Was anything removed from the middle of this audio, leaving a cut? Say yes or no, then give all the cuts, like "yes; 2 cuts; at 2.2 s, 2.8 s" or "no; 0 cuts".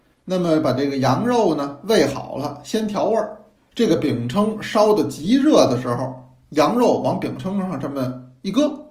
yes; 1 cut; at 3.6 s